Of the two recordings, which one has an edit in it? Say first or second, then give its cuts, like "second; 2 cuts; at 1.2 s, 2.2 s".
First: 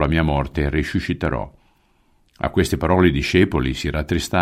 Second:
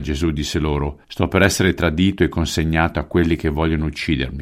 second; 1 cut; at 1.0 s